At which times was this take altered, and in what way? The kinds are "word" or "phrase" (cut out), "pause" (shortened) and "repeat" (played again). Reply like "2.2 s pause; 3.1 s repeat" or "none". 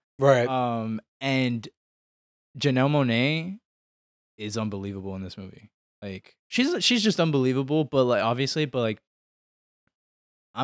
none